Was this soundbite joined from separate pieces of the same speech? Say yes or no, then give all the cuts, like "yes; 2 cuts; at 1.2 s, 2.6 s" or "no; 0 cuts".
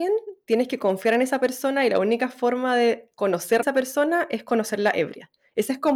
yes; 1 cut; at 3.6 s